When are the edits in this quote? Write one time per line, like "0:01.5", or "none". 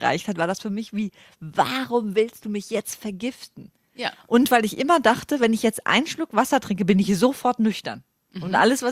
none